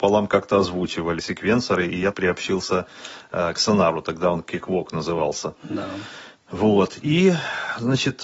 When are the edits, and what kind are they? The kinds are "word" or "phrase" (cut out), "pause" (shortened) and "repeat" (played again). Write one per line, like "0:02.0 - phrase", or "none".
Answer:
0:01.2 - word
0:02.1 - phrase